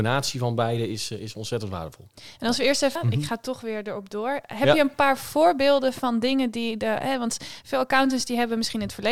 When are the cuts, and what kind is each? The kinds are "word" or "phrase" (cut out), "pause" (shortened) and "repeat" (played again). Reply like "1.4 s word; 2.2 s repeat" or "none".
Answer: 3.0 s phrase